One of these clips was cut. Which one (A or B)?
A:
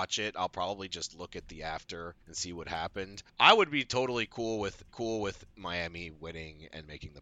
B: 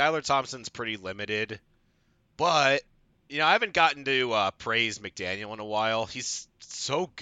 A